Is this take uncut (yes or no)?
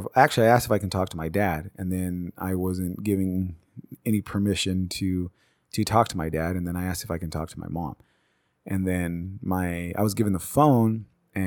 yes